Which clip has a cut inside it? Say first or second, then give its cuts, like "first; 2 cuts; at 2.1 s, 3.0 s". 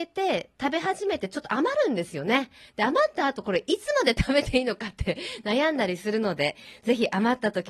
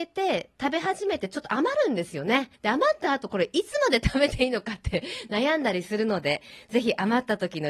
second; 1 cut; at 2.5 s